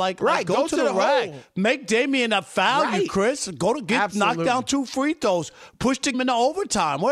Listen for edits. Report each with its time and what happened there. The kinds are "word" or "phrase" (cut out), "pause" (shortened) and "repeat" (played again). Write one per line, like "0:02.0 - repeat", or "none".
0:06.1 - word